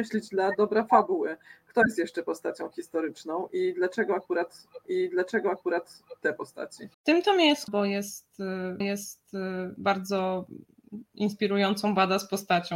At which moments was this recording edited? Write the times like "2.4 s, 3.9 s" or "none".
4.8 s, 6.9 s, 7.7 s, 8.8 s